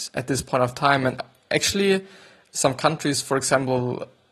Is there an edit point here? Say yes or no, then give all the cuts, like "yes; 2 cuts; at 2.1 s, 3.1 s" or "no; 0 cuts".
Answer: no; 0 cuts